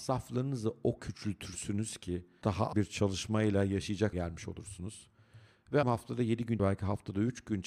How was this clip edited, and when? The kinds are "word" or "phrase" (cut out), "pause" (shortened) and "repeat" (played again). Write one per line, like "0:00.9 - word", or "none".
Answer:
0:01.0 - word
0:02.4 - word
0:02.7 - word
0:04.1 - word
0:05.8 - word
0:06.6 - word